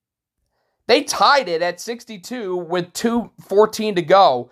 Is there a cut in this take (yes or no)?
no